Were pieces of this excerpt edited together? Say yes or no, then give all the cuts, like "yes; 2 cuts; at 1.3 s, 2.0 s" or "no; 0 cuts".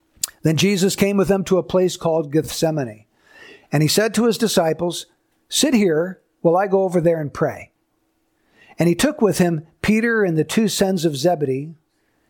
no; 0 cuts